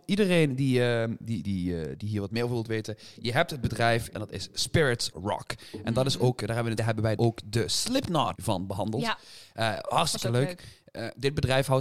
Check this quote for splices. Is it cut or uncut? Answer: cut